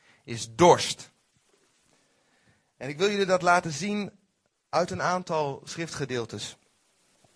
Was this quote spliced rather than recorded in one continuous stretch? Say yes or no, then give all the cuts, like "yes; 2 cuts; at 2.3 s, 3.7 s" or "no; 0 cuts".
no; 0 cuts